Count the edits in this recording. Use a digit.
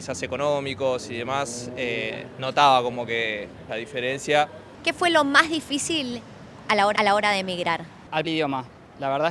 3